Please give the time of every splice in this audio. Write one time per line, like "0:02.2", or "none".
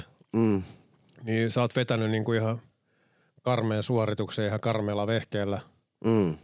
none